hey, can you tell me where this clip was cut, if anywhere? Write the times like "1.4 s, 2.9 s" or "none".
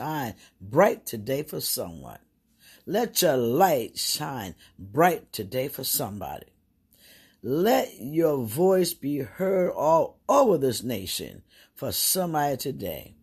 none